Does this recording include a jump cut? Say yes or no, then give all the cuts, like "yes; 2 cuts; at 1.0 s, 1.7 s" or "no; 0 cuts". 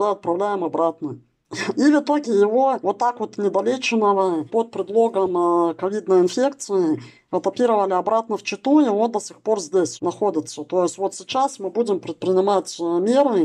no; 0 cuts